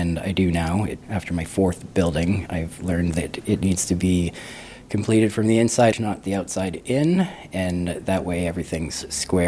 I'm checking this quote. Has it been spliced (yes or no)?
yes